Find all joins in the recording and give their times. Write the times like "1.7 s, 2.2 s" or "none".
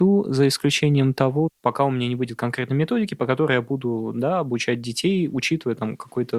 1.6 s

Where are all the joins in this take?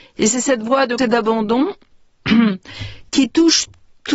1.0 s, 3.1 s

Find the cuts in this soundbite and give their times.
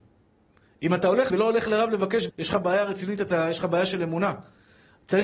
1.3 s, 2.3 s

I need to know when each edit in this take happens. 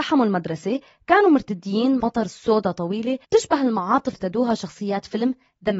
2.0 s, 3.2 s, 4.1 s

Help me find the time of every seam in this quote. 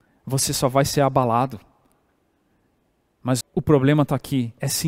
3.4 s

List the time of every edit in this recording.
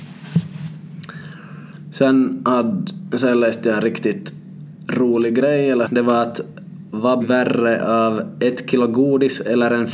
5.9 s, 7.2 s

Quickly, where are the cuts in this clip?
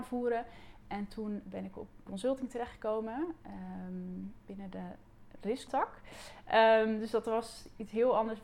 1.5 s, 2.1 s, 5.7 s

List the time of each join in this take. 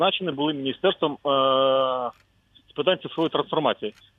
none

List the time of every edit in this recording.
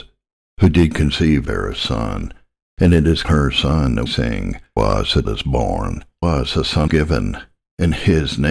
1.4 s, 3.2 s, 4.1 s, 4.8 s, 5.2 s, 6.2 s, 6.9 s

